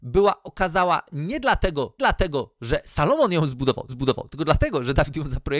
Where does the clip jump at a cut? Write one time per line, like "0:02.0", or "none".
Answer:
0:02.0
0:03.9

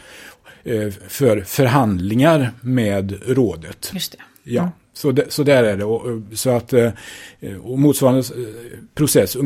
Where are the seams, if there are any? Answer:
none

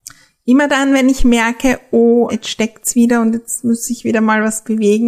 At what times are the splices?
0:02.3

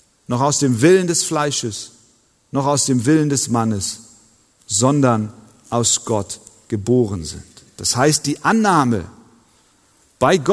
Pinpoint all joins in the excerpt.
none

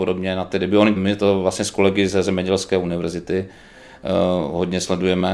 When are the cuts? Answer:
0:01.0

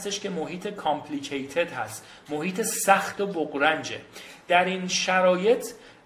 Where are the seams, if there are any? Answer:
none

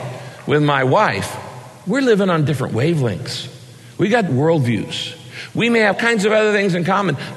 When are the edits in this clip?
0:04.3
0:05.9

